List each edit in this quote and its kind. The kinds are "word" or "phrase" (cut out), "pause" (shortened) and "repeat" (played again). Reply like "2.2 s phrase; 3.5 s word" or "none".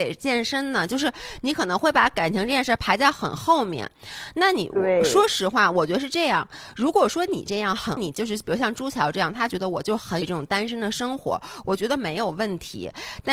8.0 s word; 10.2 s word